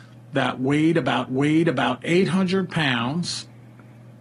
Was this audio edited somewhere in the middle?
yes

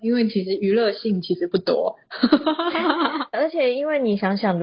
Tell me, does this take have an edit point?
yes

